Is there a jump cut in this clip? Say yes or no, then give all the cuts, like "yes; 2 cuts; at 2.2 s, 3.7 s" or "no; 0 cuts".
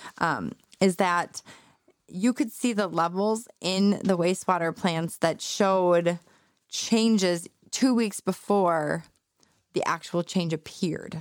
no; 0 cuts